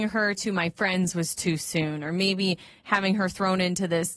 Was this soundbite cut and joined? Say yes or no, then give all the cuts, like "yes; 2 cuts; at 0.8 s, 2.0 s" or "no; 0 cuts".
no; 0 cuts